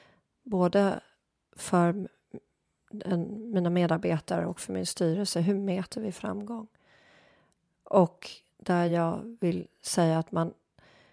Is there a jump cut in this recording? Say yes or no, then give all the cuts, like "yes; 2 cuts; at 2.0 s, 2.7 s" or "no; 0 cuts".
no; 0 cuts